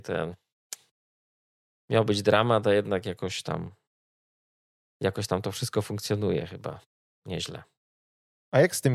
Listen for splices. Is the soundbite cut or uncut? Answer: uncut